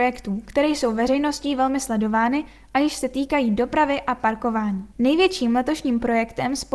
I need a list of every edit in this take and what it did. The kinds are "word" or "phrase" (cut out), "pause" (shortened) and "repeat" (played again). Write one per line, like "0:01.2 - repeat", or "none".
0:04.9 - pause